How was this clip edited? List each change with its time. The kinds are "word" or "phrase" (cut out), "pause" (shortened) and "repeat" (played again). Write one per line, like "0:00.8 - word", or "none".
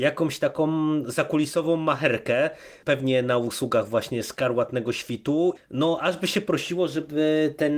0:05.6 - word